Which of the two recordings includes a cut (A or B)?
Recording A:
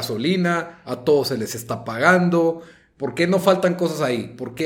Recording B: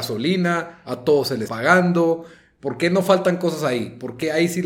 B